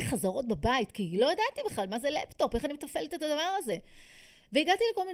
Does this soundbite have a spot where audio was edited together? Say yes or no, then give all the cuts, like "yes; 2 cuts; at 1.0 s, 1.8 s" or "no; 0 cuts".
no; 0 cuts